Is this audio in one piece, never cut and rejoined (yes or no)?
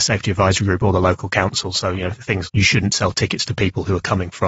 no